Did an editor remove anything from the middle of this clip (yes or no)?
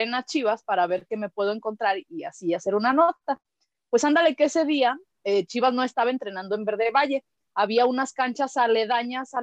no